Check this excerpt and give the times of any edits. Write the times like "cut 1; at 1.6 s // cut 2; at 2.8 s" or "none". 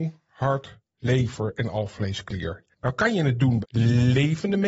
cut 1; at 2.7 s // cut 2; at 3.6 s